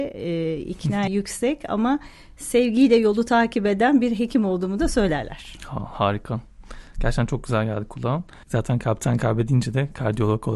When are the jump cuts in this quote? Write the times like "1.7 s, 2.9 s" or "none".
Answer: 1.1 s, 8.4 s